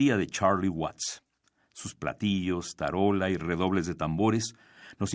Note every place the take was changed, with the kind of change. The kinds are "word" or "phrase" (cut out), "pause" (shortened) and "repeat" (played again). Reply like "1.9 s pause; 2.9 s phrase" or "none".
none